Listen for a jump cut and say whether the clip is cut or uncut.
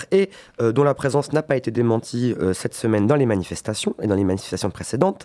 uncut